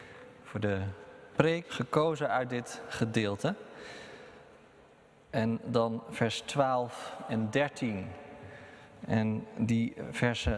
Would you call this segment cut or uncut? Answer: cut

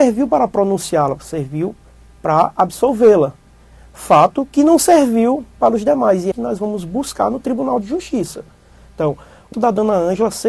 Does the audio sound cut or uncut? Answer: cut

